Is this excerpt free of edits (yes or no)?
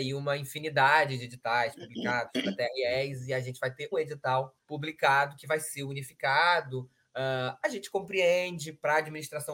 no